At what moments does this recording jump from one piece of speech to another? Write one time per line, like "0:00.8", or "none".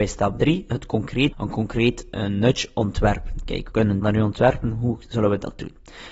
0:01.3
0:03.7
0:04.0